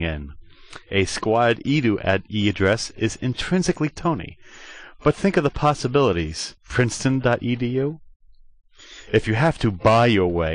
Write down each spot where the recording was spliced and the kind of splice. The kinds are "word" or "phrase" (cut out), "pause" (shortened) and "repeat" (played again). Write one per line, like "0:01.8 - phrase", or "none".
0:06.6 - pause